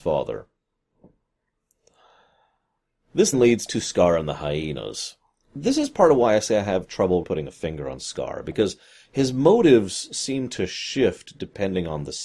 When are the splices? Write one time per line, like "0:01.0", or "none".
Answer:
0:03.3
0:07.2